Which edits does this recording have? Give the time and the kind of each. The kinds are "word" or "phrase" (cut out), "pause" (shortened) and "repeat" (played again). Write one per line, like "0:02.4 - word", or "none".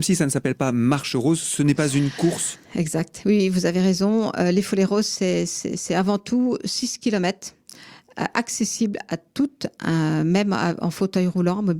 0:02.6 - pause